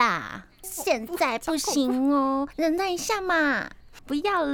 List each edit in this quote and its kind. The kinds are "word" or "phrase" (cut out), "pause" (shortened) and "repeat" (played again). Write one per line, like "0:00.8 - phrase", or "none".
0:02.5 - word